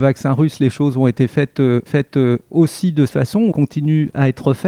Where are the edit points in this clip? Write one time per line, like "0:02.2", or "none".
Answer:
0:01.9
0:03.1
0:03.5